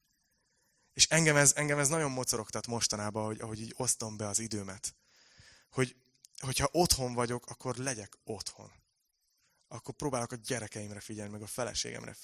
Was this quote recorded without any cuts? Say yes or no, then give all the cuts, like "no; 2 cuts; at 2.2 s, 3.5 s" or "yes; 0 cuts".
yes; 0 cuts